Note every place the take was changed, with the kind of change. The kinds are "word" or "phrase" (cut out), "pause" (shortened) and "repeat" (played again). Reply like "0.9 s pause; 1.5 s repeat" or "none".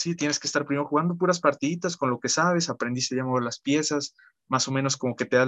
none